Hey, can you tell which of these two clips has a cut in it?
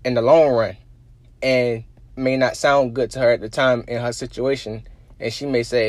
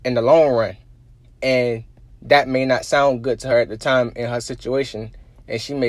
first; 1 cut; at 2.2 s

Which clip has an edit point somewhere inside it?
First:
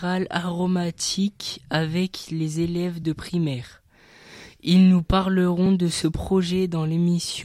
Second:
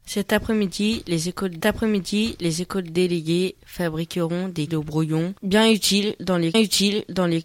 second; 4 cuts; at 1.6 s, 4.7 s, 5.4 s, 6.5 s

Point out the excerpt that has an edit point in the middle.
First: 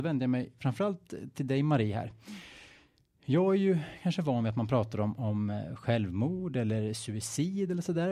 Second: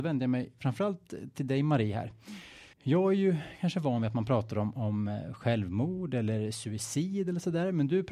second; 1 cut; at 2.7 s

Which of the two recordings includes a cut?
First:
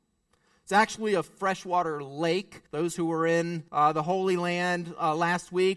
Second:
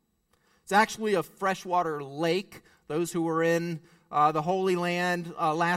first; 2 cuts; at 2.7 s, 3.7 s

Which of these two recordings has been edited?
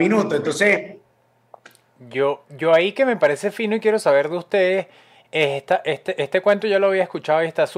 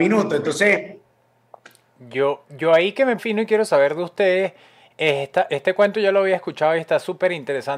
second; 2 cuts; at 3.2 s, 5.5 s

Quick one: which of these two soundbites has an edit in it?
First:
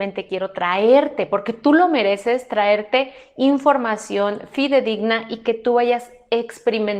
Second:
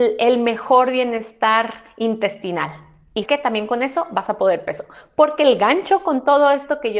second; 2 cuts; at 3.2 s, 4.6 s

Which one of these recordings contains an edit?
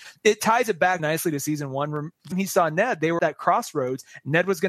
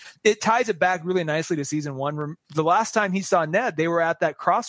first; 3 cuts; at 1.0 s, 2.3 s, 3.2 s

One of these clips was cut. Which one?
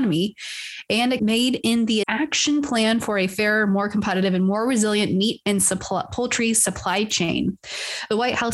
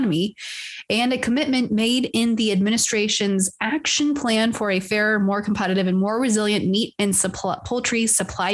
first; 2 cuts; at 1.2 s, 2.0 s

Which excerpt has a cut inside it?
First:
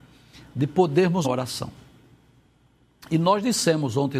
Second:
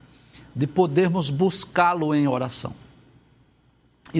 first; 1 cut; at 1.2 s

